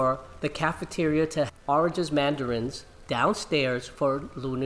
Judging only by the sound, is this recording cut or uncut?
cut